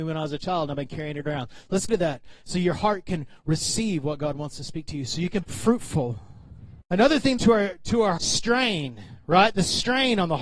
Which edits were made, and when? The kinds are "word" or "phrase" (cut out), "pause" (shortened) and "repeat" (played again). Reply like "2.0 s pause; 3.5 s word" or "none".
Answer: 1.9 s phrase; 5.4 s word; 6.8 s pause; 7.4 s phrase; 8.2 s phrase